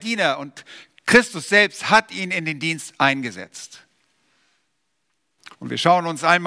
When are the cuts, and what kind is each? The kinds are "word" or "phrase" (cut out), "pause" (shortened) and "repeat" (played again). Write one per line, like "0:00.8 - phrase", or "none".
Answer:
0:05.5 - pause

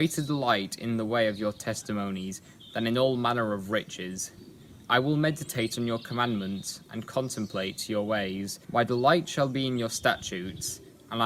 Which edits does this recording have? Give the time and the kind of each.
0:04.8 - pause
0:08.6 - pause

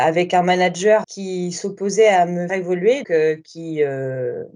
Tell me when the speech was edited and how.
0:01.0 - word
0:02.5 - word
0:03.0 - word

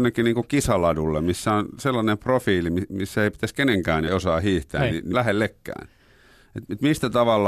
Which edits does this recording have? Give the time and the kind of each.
0:04.1 - word
0:05.1 - word

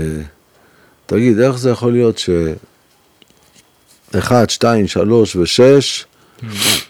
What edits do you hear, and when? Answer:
none

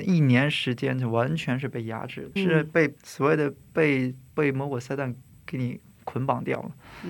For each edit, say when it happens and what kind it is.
0:02.4 - word
0:03.0 - pause

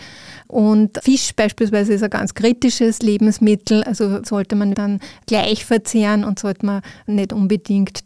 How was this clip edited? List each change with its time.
0:04.2 - phrase
0:04.7 - word

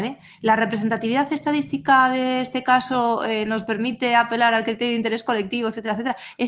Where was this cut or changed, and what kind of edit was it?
none

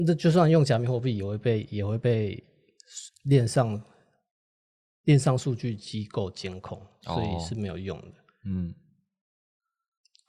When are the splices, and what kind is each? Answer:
none

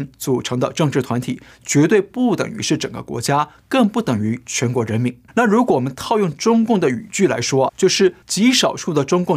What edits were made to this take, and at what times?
0:05.3 - pause
0:07.7 - word
0:08.2 - pause

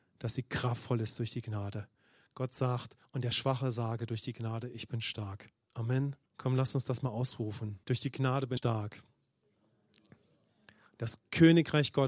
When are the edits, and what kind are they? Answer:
0:06.3 - pause
0:07.8 - pause
0:08.6 - word

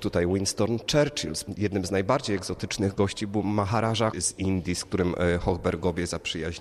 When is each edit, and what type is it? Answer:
0:04.1 - word

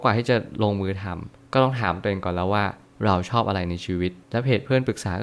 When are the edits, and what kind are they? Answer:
none

